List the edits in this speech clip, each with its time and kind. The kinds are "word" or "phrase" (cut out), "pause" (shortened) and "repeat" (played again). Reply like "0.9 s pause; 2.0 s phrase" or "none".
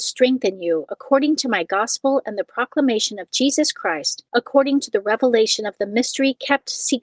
4.3 s pause